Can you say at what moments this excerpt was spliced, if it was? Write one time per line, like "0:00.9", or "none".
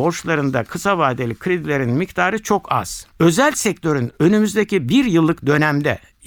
0:03.1

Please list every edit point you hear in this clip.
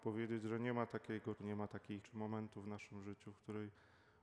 0:01.4
0:02.0

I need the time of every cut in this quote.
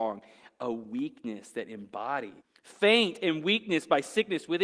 0:02.4

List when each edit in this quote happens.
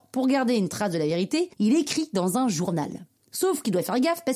0:01.5

